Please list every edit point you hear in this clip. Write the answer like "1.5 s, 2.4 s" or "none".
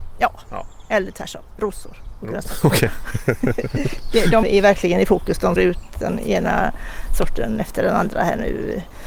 4.4 s, 5.6 s